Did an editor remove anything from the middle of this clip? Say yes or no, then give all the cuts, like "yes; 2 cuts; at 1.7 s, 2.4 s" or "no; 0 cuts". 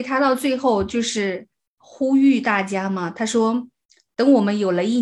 no; 0 cuts